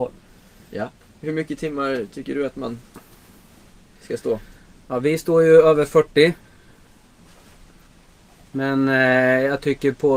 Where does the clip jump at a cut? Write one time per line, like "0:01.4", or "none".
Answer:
none